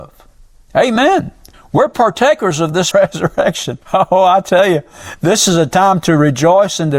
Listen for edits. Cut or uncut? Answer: cut